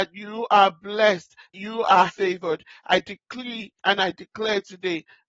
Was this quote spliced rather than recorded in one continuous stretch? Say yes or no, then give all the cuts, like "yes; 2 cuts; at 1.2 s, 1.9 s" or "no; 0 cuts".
yes; 3 cuts; at 1.5 s, 2.1 s, 3.8 s